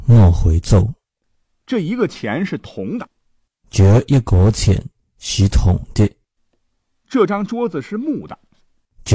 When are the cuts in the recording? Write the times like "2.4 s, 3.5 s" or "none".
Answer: none